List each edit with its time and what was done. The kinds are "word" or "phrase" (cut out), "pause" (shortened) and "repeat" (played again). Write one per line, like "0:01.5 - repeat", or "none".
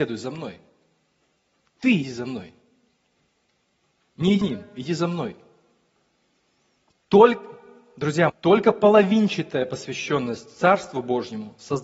0:02.0 - word
0:04.4 - word
0:08.3 - word